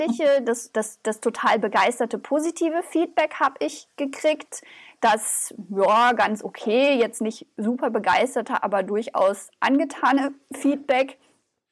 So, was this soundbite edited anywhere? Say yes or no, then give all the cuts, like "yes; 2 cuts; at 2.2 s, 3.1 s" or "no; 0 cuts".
no; 0 cuts